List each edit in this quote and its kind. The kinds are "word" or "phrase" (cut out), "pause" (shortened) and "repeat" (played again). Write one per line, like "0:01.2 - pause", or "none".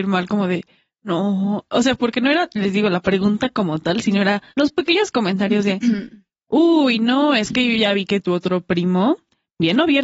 0:04.5 - pause